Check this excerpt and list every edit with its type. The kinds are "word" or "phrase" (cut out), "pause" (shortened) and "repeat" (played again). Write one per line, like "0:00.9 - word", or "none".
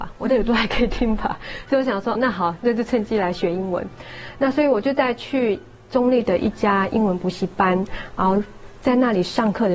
0:02.2 - word